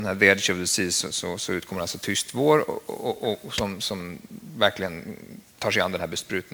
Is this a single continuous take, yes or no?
yes